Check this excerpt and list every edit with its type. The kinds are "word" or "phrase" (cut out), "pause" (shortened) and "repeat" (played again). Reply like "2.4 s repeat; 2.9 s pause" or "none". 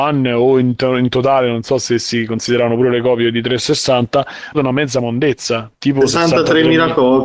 4.5 s phrase

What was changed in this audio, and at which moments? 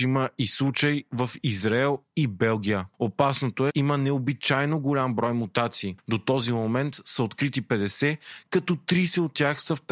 3.7 s phrase

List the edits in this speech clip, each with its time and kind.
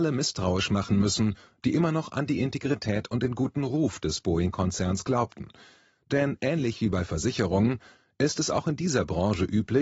none

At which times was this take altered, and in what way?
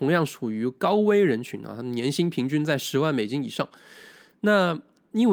none

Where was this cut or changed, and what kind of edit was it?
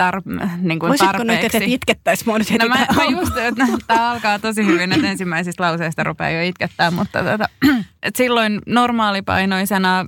none

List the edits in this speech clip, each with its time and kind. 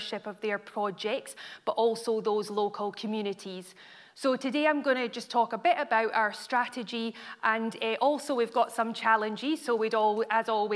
none

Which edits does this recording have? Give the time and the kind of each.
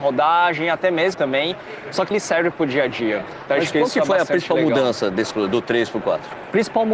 1.1 s word; 2.1 s word; 5.3 s word

